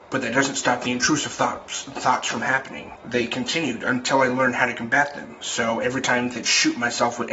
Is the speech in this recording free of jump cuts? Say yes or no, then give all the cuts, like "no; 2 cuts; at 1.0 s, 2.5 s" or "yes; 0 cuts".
yes; 0 cuts